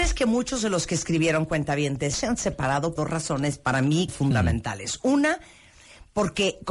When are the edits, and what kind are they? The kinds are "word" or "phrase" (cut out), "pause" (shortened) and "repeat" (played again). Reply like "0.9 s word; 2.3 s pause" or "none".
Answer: 2.1 s word; 3.0 s word; 4.1 s word